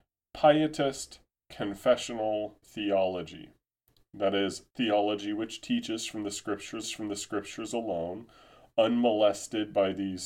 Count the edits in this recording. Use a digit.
3